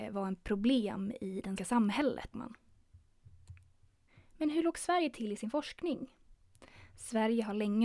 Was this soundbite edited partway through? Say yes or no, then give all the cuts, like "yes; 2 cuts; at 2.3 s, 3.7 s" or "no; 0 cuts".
yes; 2 cuts; at 1.6 s, 2.3 s